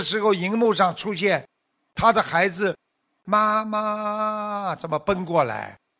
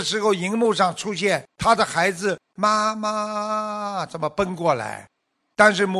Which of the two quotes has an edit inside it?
second; 2 cuts; at 1.5 s, 2.5 s

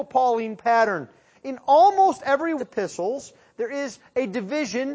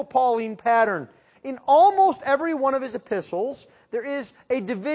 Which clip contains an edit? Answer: first; 1 cut; at 2.6 s

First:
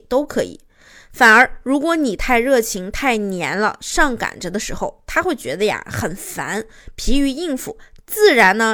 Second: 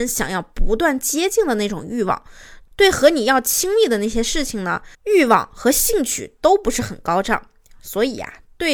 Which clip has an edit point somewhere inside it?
second; 1 cut; at 4.9 s

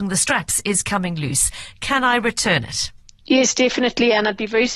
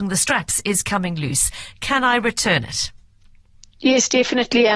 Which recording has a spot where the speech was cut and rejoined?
first; 1 cut; at 3.0 s

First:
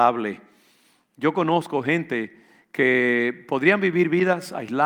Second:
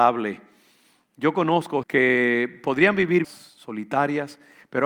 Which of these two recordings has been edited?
second; 2 cuts; at 1.8 s, 3.2 s

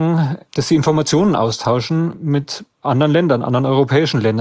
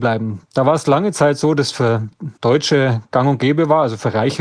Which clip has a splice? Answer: second; 1 cut; at 2.4 s

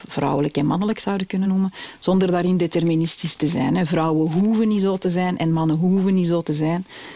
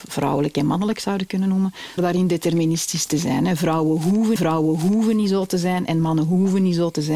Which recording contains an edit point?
second; 2 cuts; at 2.0 s, 4.4 s

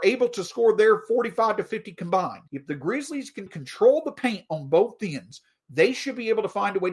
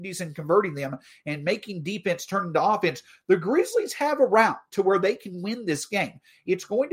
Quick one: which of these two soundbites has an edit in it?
first; 2 cuts; at 2.5 s, 3.5 s

